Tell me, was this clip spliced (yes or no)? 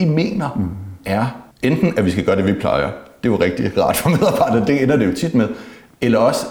yes